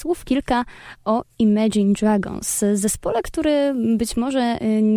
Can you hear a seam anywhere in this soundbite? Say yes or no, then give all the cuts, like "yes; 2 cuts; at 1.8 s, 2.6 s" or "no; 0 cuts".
no; 0 cuts